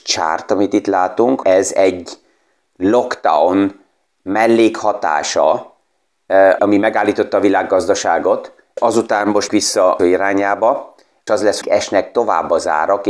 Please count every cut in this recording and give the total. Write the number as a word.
eight